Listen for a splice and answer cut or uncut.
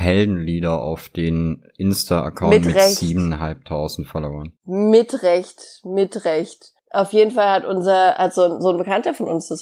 cut